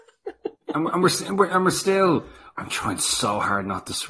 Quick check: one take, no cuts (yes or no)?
yes